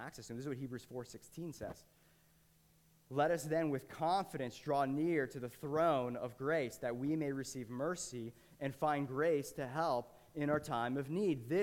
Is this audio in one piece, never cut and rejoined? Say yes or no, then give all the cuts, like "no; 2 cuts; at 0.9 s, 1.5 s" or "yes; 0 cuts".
yes; 0 cuts